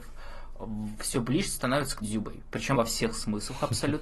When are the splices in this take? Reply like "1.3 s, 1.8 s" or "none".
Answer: 1.1 s, 2.0 s, 2.7 s